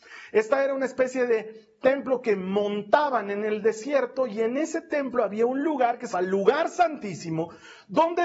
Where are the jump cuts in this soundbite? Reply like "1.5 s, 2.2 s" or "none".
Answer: 6.1 s